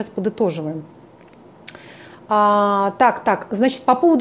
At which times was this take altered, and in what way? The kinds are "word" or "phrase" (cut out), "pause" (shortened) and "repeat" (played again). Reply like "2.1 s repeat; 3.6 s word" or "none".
none